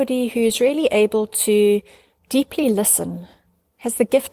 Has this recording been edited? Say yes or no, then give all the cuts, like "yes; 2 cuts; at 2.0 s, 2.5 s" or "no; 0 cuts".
no; 0 cuts